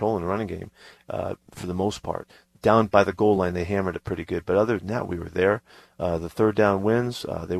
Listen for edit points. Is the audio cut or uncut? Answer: uncut